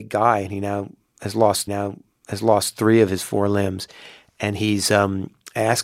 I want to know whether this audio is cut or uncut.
cut